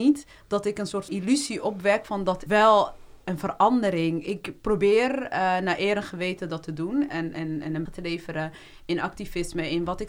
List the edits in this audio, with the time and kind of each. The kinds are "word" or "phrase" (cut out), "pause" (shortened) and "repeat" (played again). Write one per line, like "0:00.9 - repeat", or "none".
0:01.1 - word
0:02.5 - word
0:07.1 - word
0:07.9 - word